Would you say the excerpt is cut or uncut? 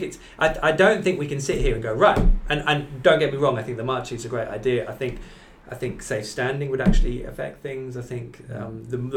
uncut